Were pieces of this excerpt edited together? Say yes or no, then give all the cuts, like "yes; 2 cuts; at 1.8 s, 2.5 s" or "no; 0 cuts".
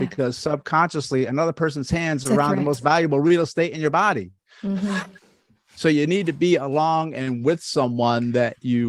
yes; 1 cut; at 5.2 s